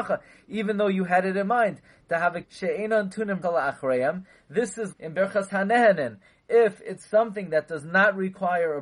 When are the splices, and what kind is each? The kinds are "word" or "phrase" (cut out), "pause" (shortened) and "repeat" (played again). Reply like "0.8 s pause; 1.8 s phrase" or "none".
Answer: 2.4 s word; 3.4 s word; 4.9 s word